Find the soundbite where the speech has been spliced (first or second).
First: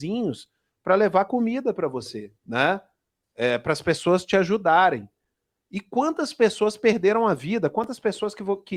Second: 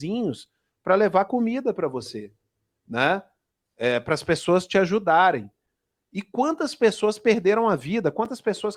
first